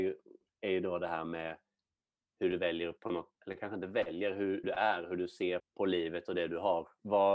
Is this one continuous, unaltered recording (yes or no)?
no